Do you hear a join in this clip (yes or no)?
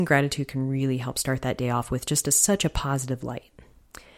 no